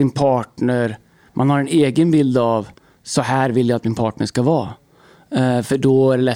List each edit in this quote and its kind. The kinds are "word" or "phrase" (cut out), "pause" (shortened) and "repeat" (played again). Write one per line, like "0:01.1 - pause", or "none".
none